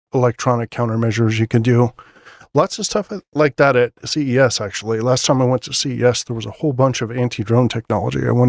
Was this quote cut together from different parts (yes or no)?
no